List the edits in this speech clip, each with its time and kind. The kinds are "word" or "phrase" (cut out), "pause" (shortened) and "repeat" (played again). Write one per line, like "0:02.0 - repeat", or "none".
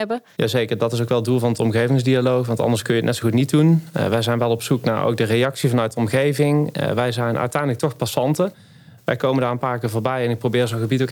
none